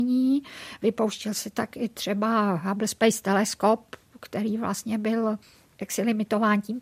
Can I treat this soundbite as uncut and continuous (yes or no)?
yes